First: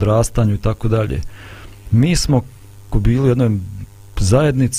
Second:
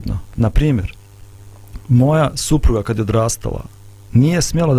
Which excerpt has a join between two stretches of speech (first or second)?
first